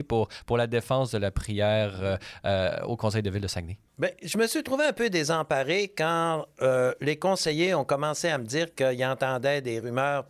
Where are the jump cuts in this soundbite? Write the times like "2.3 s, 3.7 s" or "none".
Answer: none